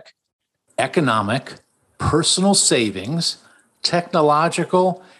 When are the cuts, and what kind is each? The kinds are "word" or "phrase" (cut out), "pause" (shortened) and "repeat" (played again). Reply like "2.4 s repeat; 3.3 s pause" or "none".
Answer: none